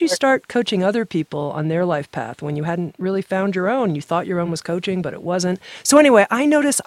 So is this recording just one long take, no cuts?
yes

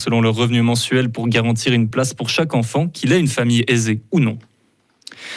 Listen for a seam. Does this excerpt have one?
no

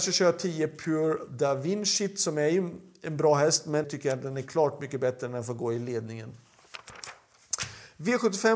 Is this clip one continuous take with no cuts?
no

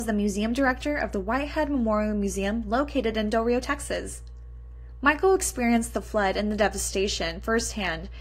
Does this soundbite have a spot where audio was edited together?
no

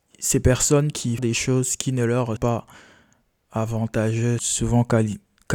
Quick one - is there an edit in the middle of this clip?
yes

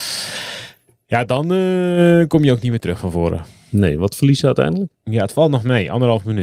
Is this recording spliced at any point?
yes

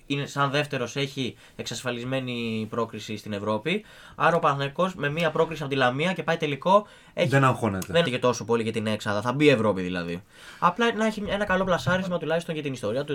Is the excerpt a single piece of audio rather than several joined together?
no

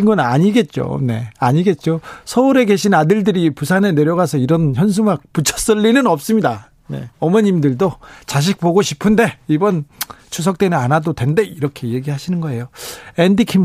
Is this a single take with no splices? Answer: no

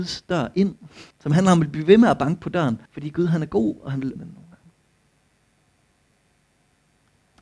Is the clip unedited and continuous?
no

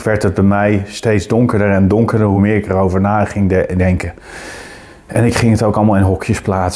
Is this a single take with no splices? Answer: yes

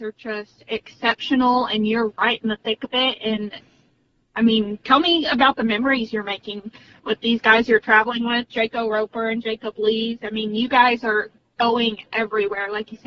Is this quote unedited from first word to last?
yes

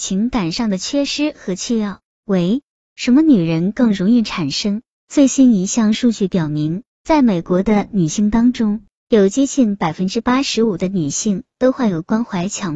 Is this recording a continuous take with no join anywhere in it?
yes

